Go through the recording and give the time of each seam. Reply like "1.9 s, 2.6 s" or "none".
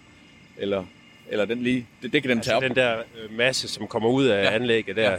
none